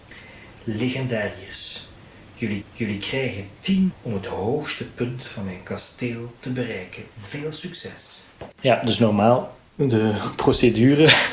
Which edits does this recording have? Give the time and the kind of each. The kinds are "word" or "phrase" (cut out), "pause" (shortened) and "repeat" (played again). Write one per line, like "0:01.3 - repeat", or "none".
0:02.6 - repeat
0:03.9 - word
0:07.1 - pause
0:08.5 - pause